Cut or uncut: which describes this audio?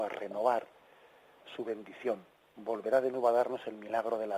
uncut